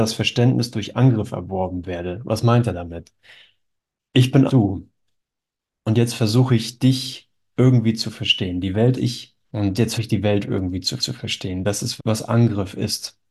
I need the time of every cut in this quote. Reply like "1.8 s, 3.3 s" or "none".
3.9 s, 4.5 s, 8.9 s, 9.4 s, 10.0 s, 11.0 s, 12.0 s